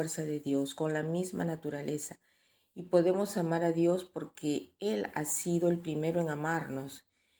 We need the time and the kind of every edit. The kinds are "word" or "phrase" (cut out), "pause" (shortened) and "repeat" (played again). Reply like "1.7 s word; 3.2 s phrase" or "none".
none